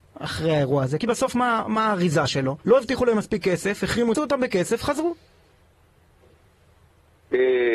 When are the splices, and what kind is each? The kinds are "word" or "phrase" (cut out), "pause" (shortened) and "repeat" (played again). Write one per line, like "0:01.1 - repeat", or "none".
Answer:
0:01.0 - word
0:02.6 - pause
0:04.1 - phrase